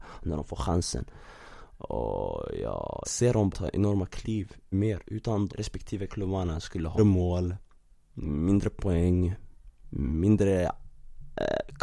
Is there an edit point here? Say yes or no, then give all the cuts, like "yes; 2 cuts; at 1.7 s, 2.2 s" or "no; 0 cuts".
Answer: yes; 6 cuts; at 3.0 s, 3.5 s, 4.7 s, 5.5 s, 6.1 s, 7.0 s